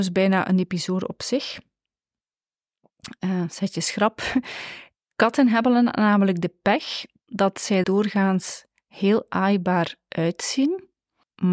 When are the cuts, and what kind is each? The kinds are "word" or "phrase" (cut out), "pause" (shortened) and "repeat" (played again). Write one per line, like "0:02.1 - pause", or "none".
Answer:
0:07.8 - word